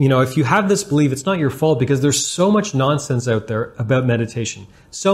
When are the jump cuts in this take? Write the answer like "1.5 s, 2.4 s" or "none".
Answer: none